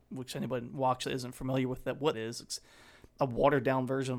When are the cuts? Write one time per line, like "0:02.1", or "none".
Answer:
0:01.0
0:02.1